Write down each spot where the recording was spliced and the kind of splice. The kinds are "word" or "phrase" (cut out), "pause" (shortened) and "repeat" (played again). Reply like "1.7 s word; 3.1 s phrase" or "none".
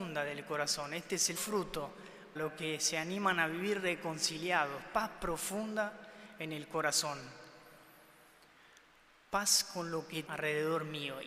1.4 s word; 2.4 s word; 10.3 s word